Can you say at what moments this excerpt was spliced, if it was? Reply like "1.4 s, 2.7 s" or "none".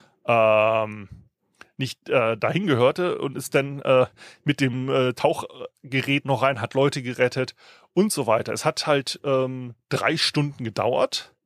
none